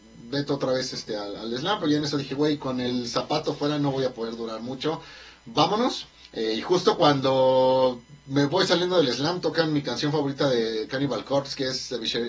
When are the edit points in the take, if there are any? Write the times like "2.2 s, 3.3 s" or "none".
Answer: 6.2 s